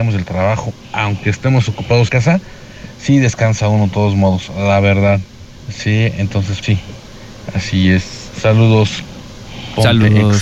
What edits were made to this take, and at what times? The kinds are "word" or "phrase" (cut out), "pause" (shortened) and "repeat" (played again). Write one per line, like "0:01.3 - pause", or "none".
0:02.1 - phrase
0:05.6 - pause
0:06.6 - word